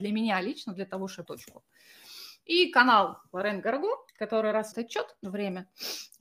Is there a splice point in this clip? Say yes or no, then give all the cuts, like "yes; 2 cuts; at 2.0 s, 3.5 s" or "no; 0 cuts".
yes; 4 cuts; at 1.3 s, 4.1 s, 4.7 s, 5.2 s